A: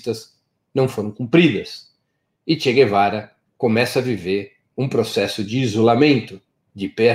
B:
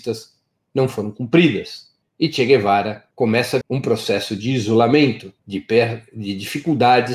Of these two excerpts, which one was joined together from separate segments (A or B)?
B